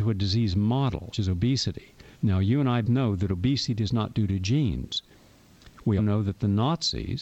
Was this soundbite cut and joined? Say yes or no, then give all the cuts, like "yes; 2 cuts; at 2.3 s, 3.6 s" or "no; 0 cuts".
yes; 4 cuts; at 1.1 s, 2.1 s, 2.8 s, 6.0 s